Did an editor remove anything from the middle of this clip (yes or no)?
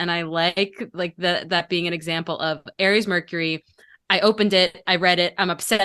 no